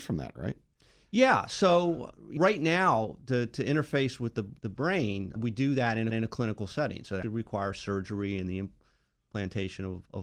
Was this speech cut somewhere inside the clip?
yes; 5 cuts; at 2.4 s, 4.6 s, 5.4 s, 6.1 s, 7.2 s

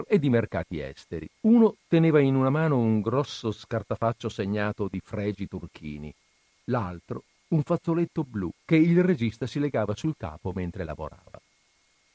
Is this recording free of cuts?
no; 2 cuts; at 1.3 s, 8.6 s

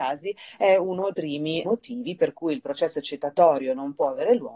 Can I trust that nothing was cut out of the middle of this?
no; 2 cuts; at 1.1 s, 1.6 s

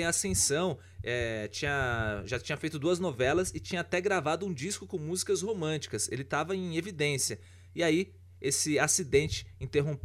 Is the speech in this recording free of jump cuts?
yes; 0 cuts

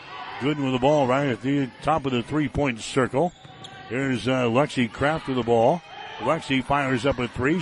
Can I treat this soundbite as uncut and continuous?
yes; 0 cuts

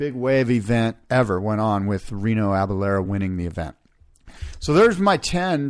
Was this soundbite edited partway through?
no; 0 cuts

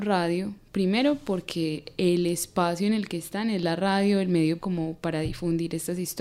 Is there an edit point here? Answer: yes; 1 cut; at 4.6 s

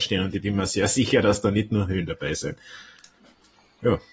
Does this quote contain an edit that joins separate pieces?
no; 0 cuts

